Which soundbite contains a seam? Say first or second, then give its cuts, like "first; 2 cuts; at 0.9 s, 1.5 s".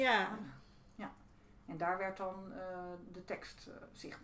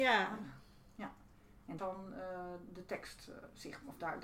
second; 1 cut; at 1.8 s